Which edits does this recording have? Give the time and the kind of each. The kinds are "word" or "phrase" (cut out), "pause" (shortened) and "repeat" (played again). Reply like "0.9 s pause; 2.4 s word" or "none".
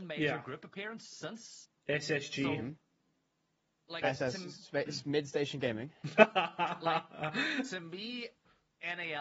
none

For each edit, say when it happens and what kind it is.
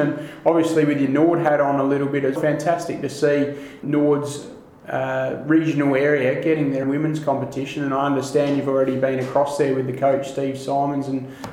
2.4 s word; 3.8 s word; 6.8 s word

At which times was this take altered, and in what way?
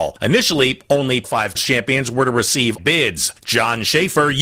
1.2 s word; 1.5 s word; 2.8 s word

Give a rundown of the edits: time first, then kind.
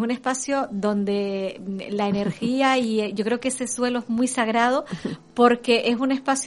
none

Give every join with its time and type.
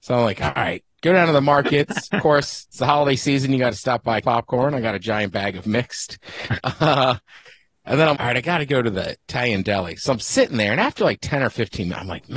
4.2 s word; 8.1 s word

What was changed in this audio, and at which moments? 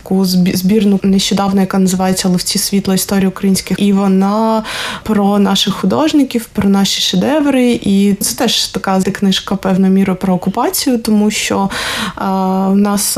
1.0 s word; 3.8 s word; 8.2 s word; 9.0 s word

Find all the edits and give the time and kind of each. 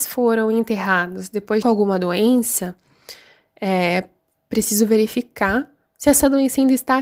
1.6 s phrase

